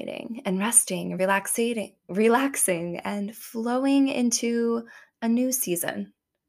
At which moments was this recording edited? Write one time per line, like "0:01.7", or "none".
none